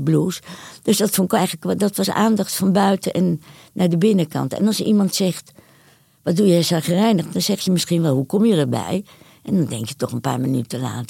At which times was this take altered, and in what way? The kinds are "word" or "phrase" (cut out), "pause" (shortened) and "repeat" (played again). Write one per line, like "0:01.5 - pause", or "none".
none